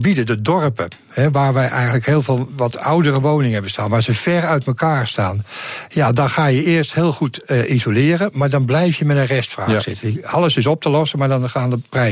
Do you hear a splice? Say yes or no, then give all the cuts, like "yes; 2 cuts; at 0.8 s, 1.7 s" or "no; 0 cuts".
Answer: no; 0 cuts